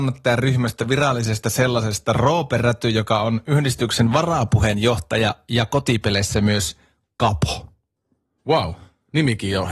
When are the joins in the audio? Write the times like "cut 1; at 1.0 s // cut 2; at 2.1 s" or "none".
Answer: none